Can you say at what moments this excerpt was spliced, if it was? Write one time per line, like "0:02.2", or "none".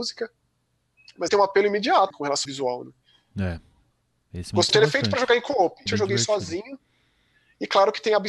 0:01.3
0:02.1
0:02.5
0:04.7
0:05.9